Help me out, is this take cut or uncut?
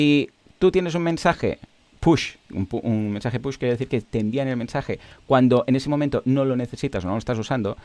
uncut